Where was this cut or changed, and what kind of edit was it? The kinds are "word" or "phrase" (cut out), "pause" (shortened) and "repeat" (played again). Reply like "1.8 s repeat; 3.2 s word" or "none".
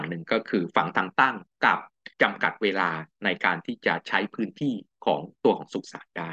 2.1 s pause